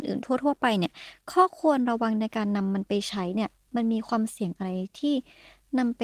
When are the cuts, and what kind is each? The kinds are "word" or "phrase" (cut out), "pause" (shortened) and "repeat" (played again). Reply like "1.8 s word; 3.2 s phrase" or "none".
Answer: none